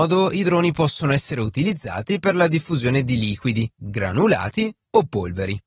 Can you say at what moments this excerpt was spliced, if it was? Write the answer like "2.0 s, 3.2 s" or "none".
none